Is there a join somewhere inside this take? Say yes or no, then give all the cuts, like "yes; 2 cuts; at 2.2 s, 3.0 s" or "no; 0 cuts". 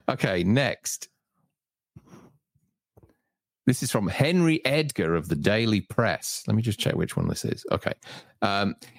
no; 0 cuts